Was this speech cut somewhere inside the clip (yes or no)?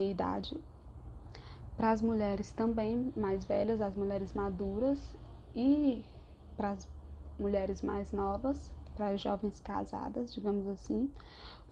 no